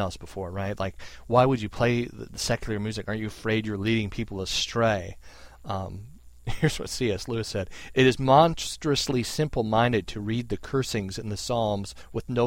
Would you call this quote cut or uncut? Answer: uncut